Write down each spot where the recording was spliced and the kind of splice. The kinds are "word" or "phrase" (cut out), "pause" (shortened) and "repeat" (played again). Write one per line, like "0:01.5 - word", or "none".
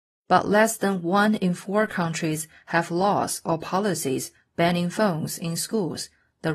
none